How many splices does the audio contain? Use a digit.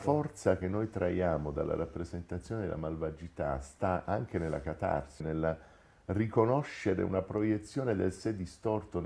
1